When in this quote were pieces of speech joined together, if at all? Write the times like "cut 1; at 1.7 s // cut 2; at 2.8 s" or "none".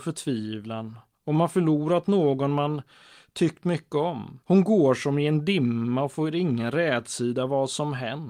cut 1; at 4.4 s